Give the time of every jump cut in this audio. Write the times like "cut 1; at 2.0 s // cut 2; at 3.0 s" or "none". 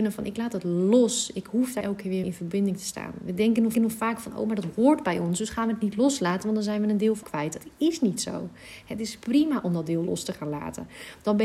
cut 1; at 1.8 s // cut 2; at 2.2 s // cut 3; at 3.7 s // cut 4; at 7.2 s